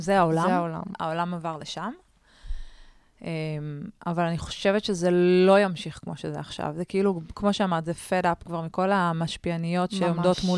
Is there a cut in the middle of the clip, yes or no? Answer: no